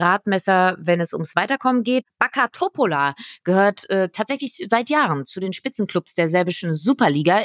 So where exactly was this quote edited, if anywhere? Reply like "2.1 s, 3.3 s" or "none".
none

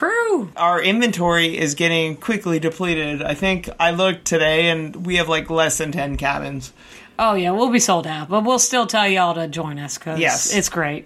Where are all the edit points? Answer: none

